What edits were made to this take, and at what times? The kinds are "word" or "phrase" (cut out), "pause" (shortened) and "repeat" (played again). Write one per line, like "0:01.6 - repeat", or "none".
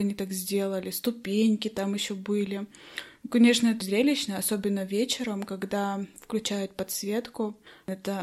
0:03.8 - word